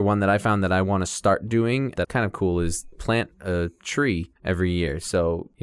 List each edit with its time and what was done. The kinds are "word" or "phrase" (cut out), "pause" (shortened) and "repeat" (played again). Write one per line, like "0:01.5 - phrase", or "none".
0:02.0 - phrase
0:02.9 - word
0:04.4 - pause